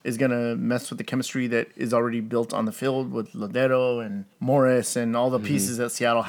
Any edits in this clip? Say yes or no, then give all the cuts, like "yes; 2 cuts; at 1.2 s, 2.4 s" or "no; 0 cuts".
yes; 1 cut; at 4.3 s